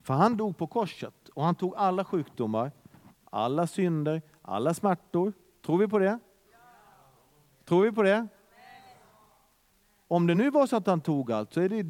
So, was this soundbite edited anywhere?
no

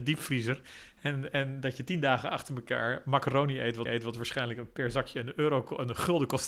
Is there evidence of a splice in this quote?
yes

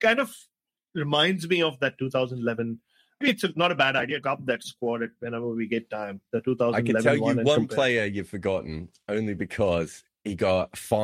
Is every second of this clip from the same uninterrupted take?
no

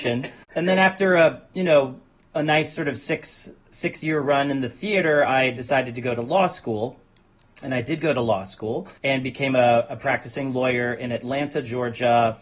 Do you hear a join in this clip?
yes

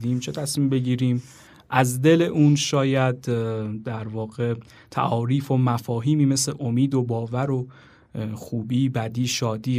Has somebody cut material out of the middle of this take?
no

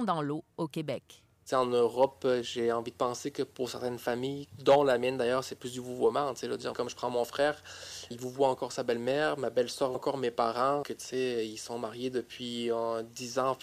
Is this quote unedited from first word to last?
no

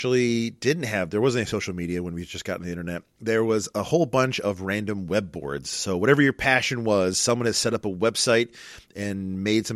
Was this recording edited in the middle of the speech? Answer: no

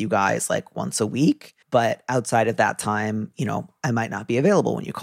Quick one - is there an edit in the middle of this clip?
yes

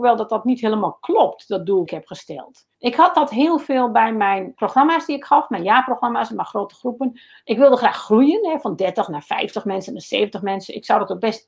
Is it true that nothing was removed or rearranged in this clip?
no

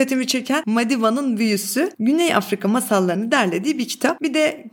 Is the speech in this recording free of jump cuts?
yes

